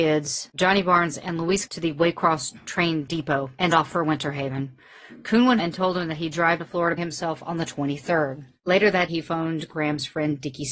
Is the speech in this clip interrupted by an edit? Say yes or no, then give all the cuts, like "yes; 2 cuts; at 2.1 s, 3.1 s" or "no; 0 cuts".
yes; 6 cuts; at 1.7 s, 3.7 s, 5.6 s, 6.6 s, 7.0 s, 9.1 s